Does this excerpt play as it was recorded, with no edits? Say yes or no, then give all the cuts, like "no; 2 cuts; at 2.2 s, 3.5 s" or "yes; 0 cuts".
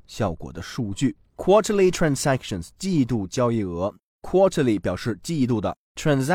yes; 0 cuts